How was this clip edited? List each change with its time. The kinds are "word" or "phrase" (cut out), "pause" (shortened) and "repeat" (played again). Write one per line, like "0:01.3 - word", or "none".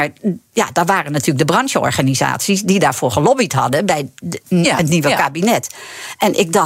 0:04.4 - word